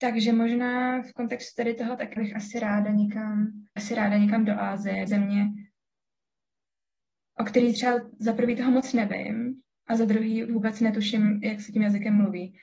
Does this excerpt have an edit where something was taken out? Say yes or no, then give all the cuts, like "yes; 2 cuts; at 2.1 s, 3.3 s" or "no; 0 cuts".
yes; 4 cuts; at 2.2 s, 3.8 s, 5.1 s, 10.5 s